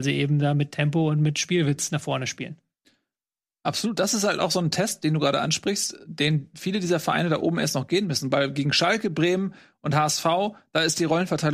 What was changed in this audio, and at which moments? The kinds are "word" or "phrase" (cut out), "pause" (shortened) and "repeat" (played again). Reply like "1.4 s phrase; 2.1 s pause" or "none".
none